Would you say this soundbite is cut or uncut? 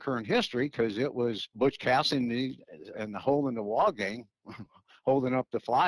cut